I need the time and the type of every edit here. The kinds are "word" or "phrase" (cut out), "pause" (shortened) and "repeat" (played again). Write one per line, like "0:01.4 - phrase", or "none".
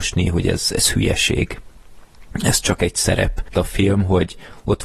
0:03.5 - phrase